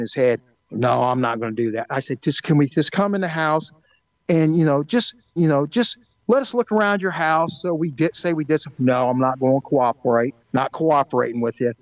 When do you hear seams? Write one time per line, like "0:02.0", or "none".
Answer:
0:05.4
0:10.4